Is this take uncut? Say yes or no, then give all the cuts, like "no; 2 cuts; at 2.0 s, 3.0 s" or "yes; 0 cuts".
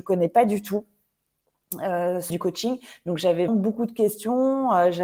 no; 2 cuts; at 2.3 s, 3.5 s